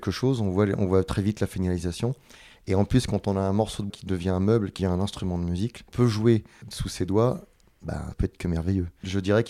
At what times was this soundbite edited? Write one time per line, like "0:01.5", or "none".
0:03.9
0:04.8
0:05.9
0:08.1